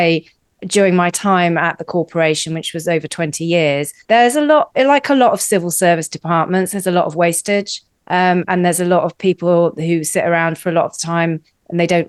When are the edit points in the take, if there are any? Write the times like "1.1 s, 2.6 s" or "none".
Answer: 4.0 s